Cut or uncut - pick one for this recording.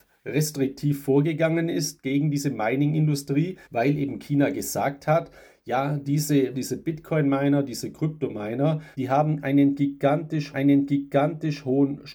cut